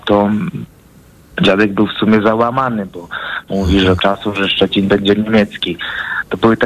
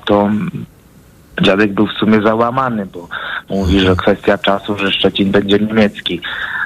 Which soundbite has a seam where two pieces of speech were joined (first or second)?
first